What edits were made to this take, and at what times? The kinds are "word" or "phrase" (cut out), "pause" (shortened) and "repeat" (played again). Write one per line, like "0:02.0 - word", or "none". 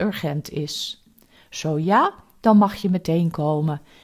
none